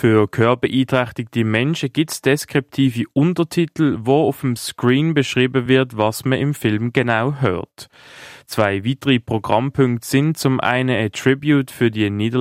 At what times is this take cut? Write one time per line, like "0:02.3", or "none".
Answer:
none